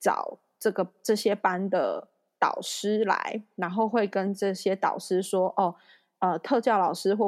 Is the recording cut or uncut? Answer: uncut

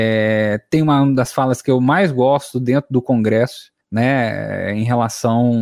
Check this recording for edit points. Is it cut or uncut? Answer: cut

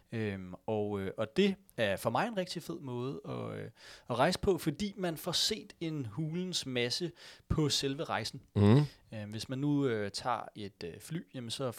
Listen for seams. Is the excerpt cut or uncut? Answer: uncut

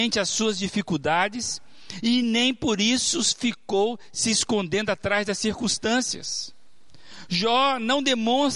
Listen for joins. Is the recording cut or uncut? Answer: uncut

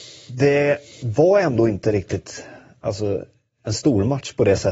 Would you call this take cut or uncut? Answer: uncut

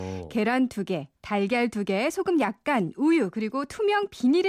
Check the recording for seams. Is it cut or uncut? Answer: uncut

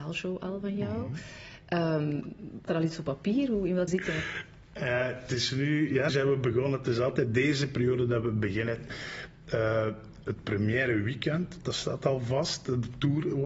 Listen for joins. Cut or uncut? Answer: cut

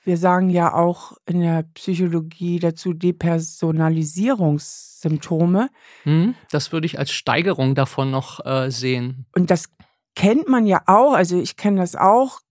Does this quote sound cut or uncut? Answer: uncut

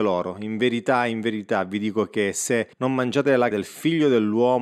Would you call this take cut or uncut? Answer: cut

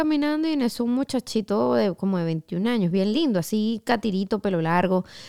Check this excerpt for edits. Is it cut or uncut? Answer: uncut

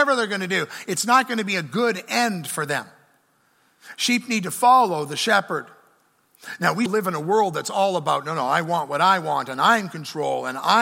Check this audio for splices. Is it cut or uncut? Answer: cut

